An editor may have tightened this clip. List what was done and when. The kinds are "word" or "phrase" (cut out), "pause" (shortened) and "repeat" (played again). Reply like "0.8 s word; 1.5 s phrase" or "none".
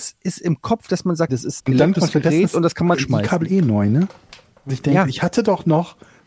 1.3 s word; 1.6 s word; 1.9 s word; 2.9 s word; 4.7 s word